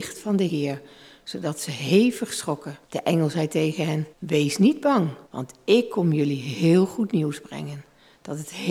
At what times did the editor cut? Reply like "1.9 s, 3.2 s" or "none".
2.8 s, 4.1 s, 5.2 s